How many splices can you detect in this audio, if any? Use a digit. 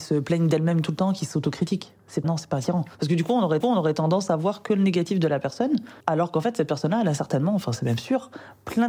4